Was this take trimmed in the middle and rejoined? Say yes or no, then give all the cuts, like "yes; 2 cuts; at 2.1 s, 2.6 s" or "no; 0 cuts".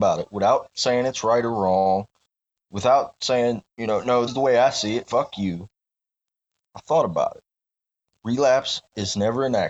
yes; 1 cut; at 4.3 s